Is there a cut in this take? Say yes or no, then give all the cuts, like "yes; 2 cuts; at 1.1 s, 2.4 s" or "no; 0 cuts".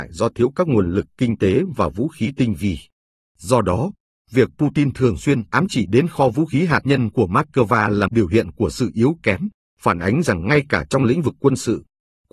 yes; 1 cut; at 8.1 s